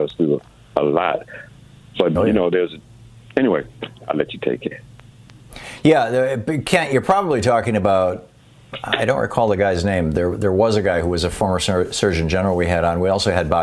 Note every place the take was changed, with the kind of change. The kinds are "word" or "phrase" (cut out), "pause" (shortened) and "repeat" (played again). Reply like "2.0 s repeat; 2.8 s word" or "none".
2.2 s word